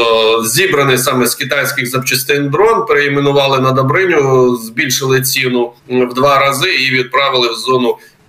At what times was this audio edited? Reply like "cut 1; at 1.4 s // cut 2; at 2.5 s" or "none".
cut 1; at 5.8 s